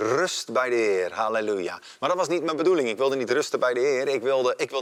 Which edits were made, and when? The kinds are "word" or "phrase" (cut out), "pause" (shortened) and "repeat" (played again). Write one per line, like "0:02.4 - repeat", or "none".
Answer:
none